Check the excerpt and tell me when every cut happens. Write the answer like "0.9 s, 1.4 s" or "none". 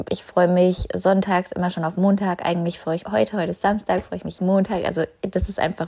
3.0 s, 4.4 s